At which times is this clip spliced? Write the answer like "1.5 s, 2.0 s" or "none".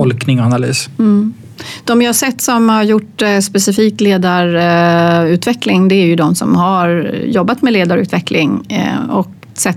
none